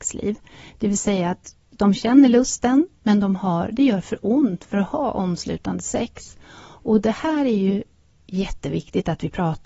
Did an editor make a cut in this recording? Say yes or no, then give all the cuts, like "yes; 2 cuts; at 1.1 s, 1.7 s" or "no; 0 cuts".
no; 0 cuts